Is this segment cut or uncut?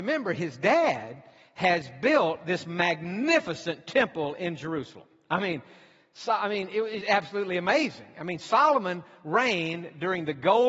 cut